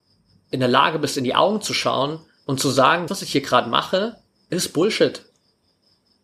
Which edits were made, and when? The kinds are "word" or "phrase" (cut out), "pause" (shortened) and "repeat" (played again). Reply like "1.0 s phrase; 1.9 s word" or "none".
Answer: 3.1 s word

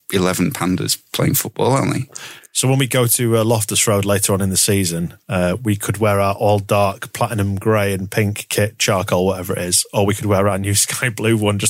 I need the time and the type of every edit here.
none

